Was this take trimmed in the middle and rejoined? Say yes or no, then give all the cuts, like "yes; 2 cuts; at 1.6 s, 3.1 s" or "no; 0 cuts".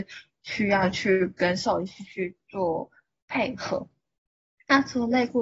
no; 0 cuts